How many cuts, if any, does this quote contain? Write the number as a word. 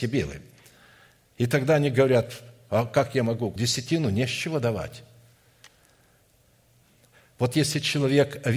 one